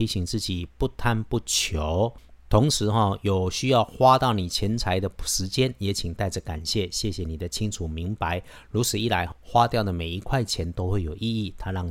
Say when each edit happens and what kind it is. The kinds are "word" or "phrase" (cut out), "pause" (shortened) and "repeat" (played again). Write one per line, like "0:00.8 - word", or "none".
0:09.3 - word